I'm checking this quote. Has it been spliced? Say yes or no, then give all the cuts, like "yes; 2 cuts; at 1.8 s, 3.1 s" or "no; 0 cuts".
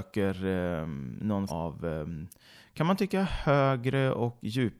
yes; 1 cut; at 1.5 s